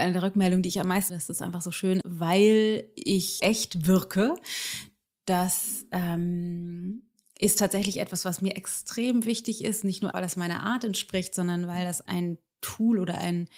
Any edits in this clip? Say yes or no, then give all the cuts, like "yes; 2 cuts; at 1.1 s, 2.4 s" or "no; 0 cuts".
yes; 5 cuts; at 1.1 s, 2.0 s, 3.4 s, 10.1 s, 12.1 s